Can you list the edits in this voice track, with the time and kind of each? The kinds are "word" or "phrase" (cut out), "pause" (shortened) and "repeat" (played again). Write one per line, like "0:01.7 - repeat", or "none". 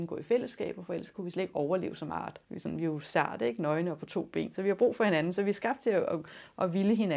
0:02.4 - pause